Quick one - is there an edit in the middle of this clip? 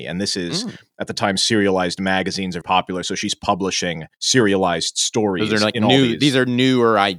yes; 2 cuts; at 2.6 s, 4.1 s

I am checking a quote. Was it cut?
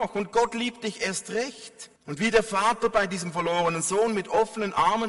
yes; 1 cut; at 2.0 s

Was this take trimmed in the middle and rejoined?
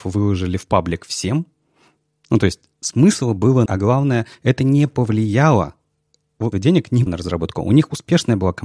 yes; 3 cuts; at 3.7 s, 6.5 s, 7.1 s

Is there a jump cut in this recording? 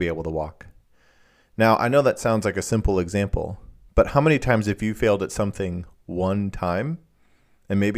no; 0 cuts

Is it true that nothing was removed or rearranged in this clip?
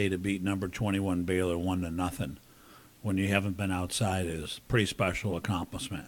yes; 0 cuts

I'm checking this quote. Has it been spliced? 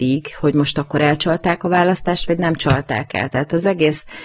no; 0 cuts

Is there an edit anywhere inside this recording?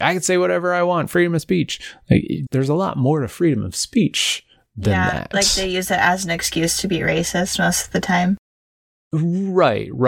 yes; 1 cut; at 2.5 s

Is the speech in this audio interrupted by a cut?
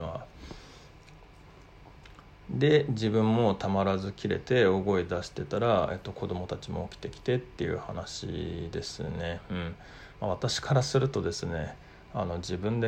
no; 0 cuts

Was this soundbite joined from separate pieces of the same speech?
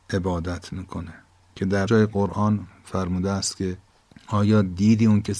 yes; 1 cut; at 1.9 s

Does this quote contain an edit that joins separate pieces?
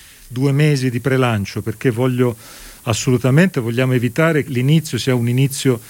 yes; 1 cut; at 4.5 s

